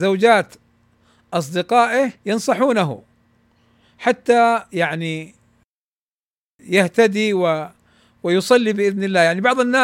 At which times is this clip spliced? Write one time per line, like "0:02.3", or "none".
0:02.2